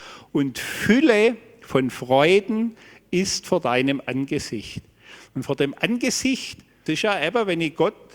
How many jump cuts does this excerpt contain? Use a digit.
1